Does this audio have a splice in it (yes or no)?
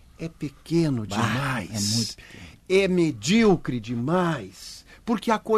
no